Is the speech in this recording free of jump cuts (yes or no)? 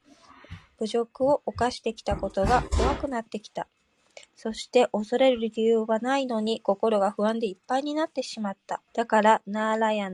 no